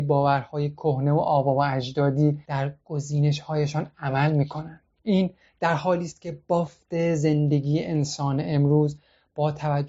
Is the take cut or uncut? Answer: uncut